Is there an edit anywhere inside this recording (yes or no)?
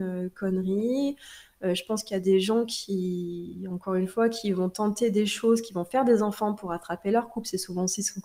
no